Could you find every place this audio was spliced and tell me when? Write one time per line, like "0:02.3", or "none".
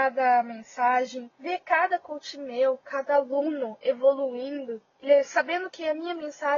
0:01.3
0:04.9